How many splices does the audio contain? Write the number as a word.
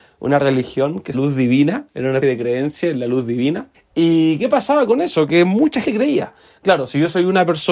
four